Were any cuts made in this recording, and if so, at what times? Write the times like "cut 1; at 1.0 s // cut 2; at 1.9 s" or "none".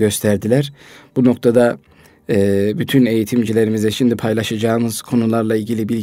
none